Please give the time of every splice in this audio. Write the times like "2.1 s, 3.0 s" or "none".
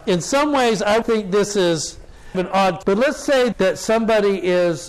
1.0 s, 2.3 s, 2.8 s, 3.5 s